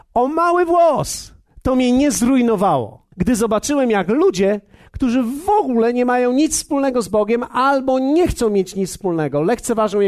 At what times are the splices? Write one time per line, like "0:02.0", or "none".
0:03.1